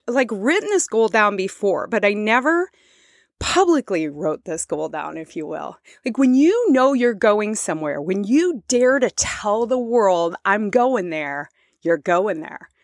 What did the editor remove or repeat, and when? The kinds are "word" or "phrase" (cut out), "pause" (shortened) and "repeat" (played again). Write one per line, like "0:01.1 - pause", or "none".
none

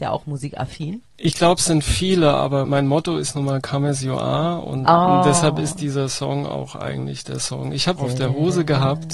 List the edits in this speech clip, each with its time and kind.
0:02.6 - word
0:08.0 - phrase

